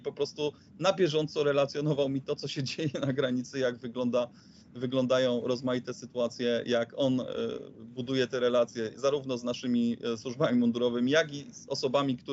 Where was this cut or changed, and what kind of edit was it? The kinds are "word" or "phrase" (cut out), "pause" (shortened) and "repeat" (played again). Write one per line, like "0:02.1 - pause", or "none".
none